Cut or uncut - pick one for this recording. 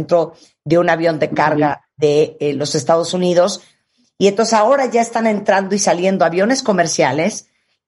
uncut